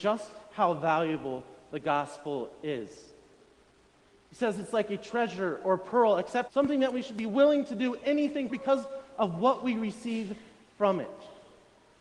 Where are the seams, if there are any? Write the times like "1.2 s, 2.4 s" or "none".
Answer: 6.5 s, 8.5 s